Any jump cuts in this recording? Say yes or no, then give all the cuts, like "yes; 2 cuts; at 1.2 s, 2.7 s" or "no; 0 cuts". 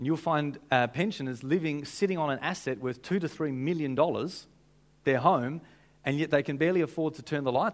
no; 0 cuts